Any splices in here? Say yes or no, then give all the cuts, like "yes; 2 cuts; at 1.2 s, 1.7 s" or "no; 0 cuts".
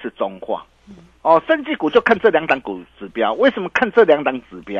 no; 0 cuts